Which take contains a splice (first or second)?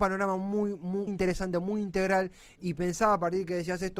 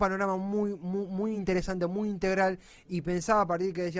first